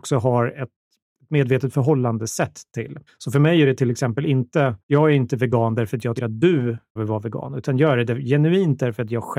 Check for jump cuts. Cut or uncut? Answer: cut